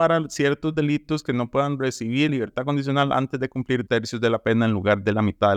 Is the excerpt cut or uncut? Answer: cut